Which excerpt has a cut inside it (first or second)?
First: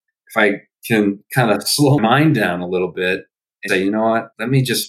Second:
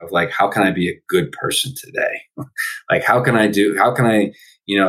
first